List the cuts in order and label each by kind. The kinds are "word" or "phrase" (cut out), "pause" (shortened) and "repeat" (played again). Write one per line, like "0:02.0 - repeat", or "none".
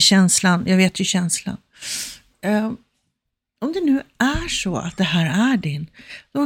none